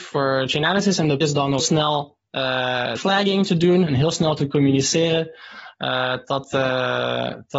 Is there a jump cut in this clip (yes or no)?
yes